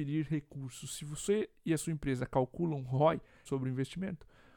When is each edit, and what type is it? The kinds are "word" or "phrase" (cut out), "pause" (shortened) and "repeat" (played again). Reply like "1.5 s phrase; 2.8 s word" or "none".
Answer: 3.5 s word